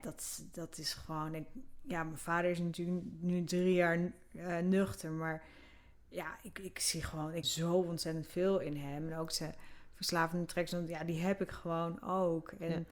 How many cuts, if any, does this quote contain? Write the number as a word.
one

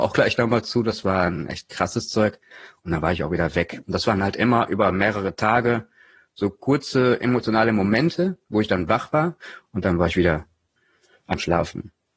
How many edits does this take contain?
zero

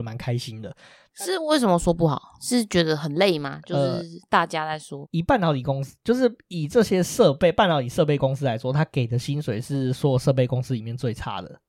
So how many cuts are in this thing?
one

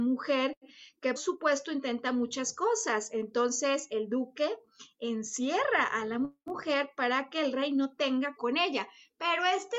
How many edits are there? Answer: two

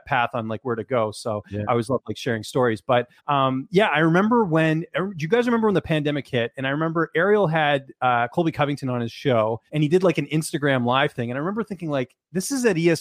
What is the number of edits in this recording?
two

